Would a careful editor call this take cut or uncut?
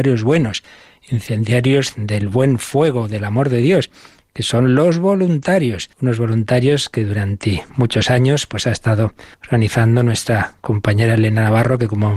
cut